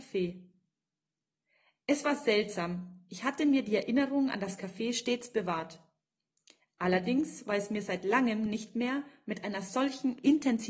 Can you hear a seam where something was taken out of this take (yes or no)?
no